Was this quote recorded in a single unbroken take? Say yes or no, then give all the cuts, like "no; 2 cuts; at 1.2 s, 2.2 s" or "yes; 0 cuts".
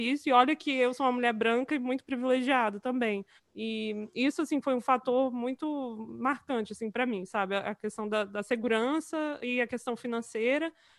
no; 1 cut; at 3.4 s